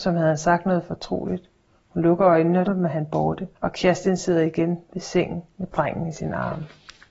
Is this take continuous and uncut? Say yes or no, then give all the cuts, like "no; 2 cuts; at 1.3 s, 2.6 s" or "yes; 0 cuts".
no; 2 cuts; at 2.7 s, 3.5 s